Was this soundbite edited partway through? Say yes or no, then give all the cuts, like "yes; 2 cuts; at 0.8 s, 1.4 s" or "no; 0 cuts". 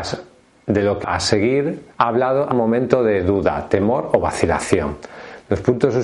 yes; 3 cuts; at 1.0 s, 1.9 s, 2.5 s